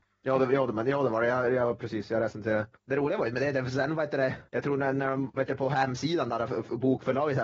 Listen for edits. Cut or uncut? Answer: cut